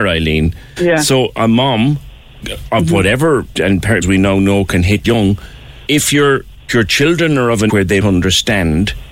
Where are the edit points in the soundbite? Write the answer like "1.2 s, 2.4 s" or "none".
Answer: 3.6 s, 4.0 s, 5.0 s, 5.9 s, 6.7 s, 7.7 s, 8.0 s